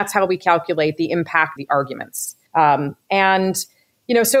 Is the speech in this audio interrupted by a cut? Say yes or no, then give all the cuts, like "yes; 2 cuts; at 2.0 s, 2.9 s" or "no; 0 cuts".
yes; 2 cuts; at 1.6 s, 2.5 s